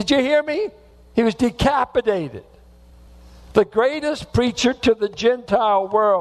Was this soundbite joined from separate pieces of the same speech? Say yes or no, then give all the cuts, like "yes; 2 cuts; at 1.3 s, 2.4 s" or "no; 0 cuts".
no; 0 cuts